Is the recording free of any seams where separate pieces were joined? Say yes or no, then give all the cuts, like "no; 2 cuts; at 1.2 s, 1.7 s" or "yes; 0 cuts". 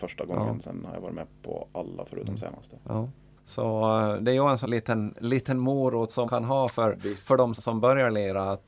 no; 3 cuts; at 4.6 s, 6.3 s, 7.6 s